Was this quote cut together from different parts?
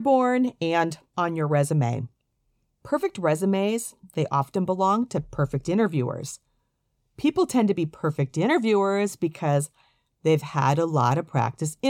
no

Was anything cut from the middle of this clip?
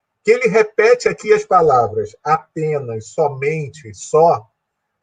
no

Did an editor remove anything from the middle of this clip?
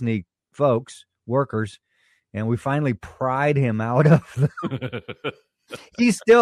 no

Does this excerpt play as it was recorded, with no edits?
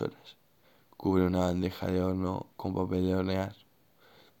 no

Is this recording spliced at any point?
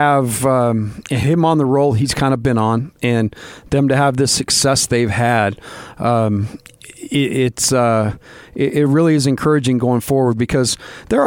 no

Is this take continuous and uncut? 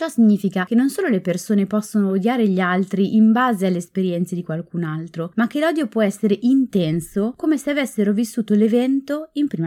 yes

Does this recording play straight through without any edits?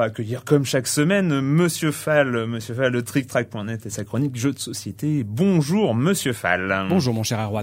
yes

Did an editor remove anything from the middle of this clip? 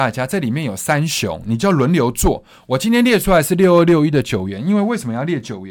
no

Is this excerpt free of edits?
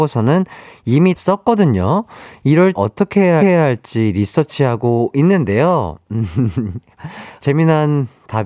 no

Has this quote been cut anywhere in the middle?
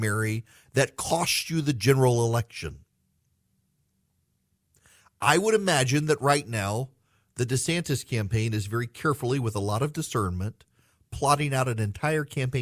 no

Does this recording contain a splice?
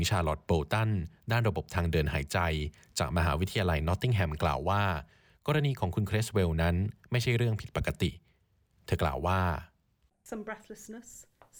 no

